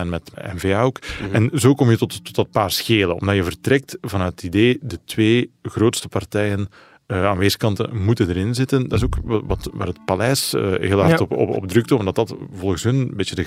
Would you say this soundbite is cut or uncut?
uncut